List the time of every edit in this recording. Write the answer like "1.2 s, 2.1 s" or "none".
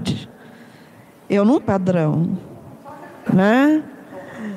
1.6 s, 3.3 s

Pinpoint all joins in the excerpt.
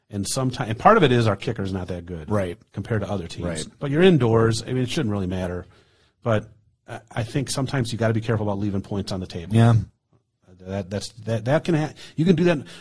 none

